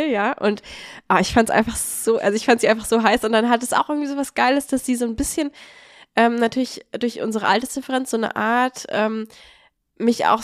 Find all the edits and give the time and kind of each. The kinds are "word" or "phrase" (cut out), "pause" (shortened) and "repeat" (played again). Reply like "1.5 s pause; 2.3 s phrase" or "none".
none